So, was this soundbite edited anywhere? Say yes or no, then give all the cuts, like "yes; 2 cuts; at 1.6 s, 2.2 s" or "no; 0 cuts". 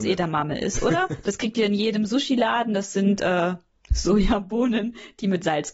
no; 0 cuts